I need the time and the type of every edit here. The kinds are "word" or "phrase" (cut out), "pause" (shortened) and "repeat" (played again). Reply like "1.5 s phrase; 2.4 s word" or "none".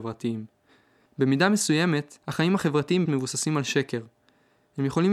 2.2 s pause; 3.0 s phrase